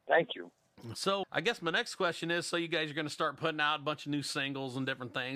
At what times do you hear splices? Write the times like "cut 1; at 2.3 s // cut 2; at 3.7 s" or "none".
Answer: cut 1; at 1.2 s